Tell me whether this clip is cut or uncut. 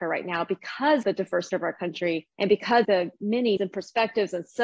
cut